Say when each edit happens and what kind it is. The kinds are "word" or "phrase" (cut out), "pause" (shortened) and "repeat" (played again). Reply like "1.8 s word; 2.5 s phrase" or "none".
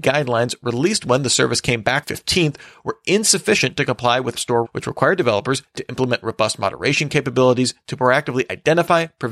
2.0 s phrase; 4.3 s word; 4.6 s word